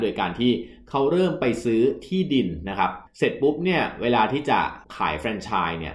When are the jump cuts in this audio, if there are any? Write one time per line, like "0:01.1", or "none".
0:03.1
0:04.8